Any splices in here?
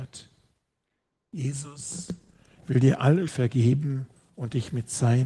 yes; 1 cut; at 3.3 s

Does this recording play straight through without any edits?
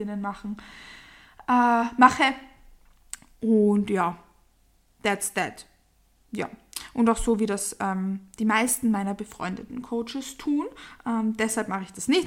yes; 0 cuts

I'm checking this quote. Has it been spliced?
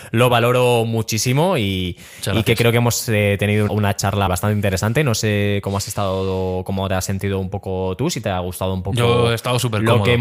yes; 2 cuts; at 3.7 s, 4.3 s

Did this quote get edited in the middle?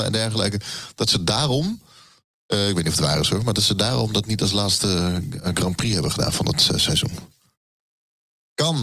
no; 0 cuts

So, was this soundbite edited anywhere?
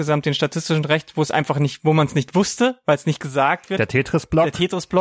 no; 0 cuts

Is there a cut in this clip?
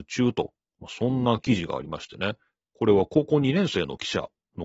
no; 0 cuts

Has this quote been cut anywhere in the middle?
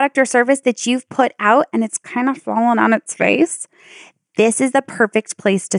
no; 0 cuts

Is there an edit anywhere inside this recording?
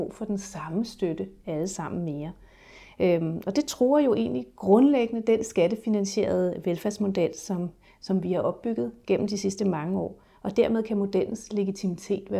no; 0 cuts

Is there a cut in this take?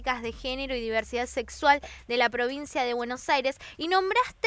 no; 0 cuts

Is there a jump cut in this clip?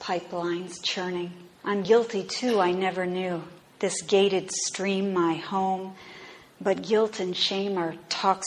yes; 2 cuts; at 1.5 s, 3.6 s

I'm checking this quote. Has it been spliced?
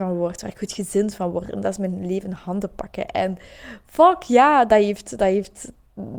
no; 0 cuts

